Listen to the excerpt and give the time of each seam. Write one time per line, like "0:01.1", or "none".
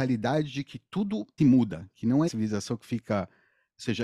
0:01.4
0:02.3